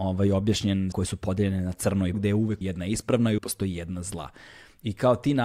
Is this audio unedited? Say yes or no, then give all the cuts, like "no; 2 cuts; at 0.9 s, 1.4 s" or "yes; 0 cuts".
no; 4 cuts; at 0.9 s, 2.1 s, 2.6 s, 3.4 s